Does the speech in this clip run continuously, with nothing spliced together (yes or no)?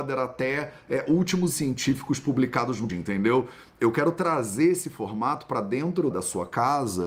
no